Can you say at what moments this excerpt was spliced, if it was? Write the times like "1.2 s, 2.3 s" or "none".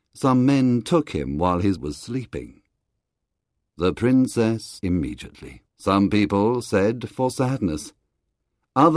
1.8 s, 4.8 s, 5.7 s